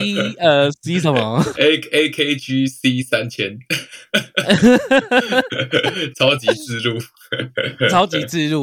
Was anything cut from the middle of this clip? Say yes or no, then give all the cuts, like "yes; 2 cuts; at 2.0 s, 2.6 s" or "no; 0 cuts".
no; 0 cuts